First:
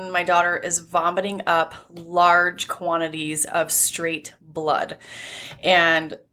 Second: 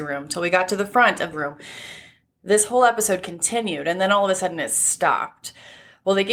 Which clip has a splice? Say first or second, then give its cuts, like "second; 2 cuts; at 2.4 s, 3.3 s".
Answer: second; 1 cut; at 1.3 s